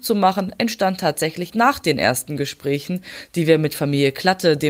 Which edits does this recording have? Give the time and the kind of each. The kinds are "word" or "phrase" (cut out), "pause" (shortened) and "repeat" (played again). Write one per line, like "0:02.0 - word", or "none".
0:01.5 - word